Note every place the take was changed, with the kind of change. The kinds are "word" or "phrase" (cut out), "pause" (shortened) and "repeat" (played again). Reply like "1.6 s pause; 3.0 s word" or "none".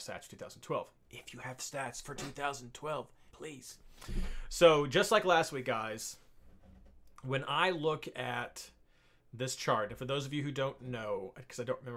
3.3 s phrase